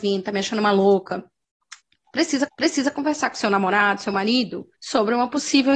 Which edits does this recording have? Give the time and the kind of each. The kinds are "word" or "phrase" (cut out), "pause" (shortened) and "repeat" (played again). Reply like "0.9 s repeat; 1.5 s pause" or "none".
2.5 s repeat; 4.7 s pause